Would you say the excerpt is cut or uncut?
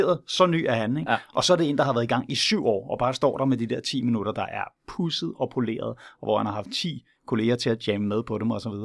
uncut